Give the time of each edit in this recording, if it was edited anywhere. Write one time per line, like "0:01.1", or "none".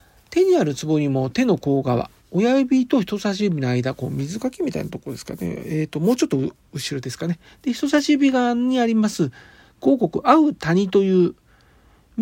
none